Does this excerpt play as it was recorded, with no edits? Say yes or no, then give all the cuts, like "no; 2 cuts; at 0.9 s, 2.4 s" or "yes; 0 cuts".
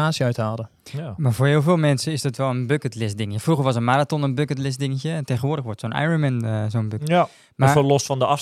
yes; 0 cuts